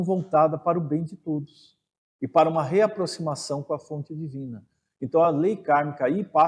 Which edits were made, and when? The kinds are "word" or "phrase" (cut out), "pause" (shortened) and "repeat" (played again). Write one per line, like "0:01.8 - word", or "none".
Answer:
none